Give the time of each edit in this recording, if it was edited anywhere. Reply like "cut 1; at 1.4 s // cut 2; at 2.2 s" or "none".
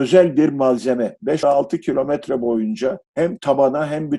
cut 1; at 1.4 s // cut 2; at 3.1 s